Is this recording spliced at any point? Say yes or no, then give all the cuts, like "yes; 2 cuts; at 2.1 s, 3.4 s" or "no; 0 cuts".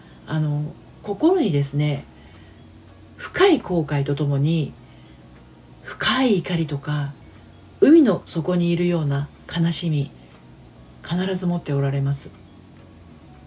no; 0 cuts